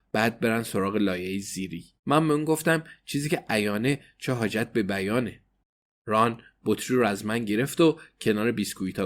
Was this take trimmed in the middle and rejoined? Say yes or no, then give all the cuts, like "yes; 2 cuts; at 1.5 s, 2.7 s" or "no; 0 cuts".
yes; 1 cut; at 2.0 s